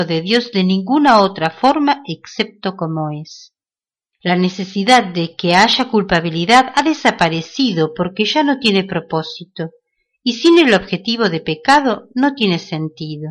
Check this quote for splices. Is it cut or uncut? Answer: uncut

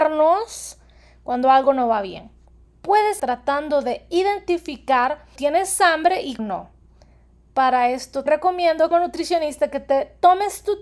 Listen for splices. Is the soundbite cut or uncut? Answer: cut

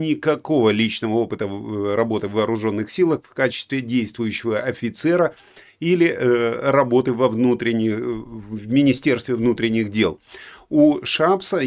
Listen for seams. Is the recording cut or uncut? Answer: uncut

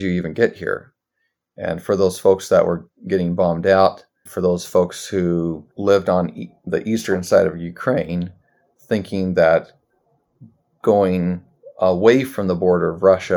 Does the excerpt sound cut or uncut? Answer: cut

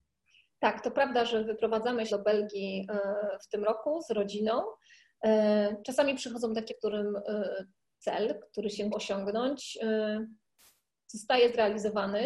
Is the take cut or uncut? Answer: cut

